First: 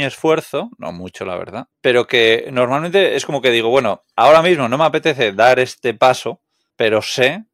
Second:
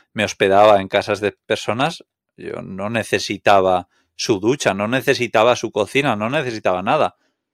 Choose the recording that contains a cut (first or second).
first